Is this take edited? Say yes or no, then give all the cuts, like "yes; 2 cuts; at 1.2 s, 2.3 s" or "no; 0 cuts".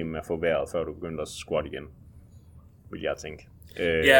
no; 0 cuts